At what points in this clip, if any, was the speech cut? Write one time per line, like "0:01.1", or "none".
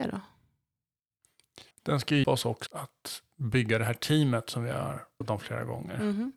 0:01.7
0:02.2
0:02.7
0:05.2